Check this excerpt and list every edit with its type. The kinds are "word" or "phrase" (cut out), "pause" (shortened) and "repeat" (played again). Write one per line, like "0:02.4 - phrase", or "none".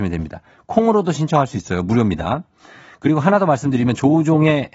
none